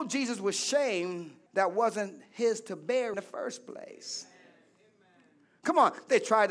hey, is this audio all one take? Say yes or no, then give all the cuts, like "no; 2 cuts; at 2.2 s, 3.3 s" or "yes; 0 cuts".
no; 2 cuts; at 1.5 s, 3.1 s